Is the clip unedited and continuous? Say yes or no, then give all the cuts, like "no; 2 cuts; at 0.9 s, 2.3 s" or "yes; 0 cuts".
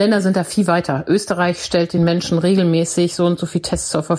yes; 0 cuts